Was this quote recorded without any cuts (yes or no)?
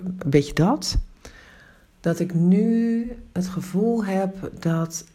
yes